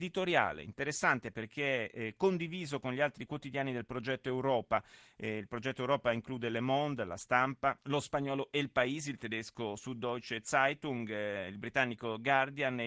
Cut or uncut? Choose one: cut